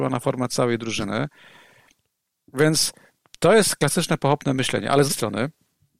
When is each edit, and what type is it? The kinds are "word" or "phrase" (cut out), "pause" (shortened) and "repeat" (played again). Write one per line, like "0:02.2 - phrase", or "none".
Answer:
0:05.1 - word